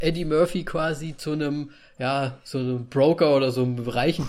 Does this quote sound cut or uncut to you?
uncut